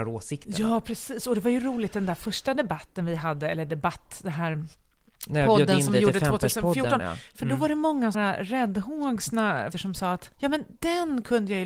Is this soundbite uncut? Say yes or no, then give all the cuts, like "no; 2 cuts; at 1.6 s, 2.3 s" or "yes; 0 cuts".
no; 3 cuts; at 8.1 s, 9.7 s, 10.3 s